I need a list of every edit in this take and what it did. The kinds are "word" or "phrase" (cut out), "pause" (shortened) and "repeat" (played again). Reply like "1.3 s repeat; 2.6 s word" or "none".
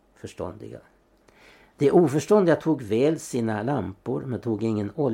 none